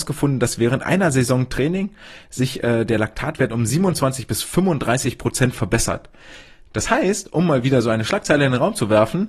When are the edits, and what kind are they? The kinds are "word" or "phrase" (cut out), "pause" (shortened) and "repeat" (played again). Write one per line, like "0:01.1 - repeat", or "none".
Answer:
none